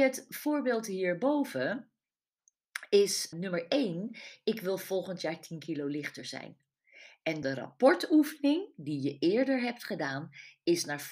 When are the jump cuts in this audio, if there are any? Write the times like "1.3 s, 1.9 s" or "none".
3.3 s, 7.4 s